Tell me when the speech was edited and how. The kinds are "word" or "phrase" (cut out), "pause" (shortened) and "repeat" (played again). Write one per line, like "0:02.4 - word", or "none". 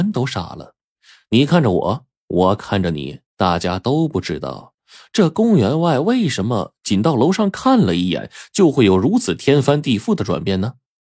0:03.3 - pause

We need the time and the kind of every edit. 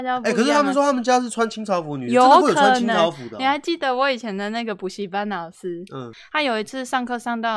none

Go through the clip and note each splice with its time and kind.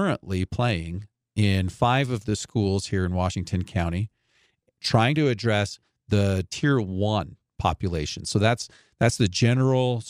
none

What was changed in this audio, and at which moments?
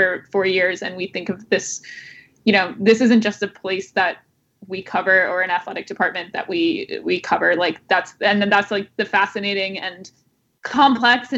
none

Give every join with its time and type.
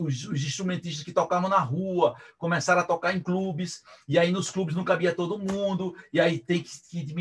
none

